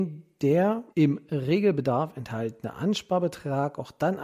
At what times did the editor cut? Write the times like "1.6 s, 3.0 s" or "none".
0.9 s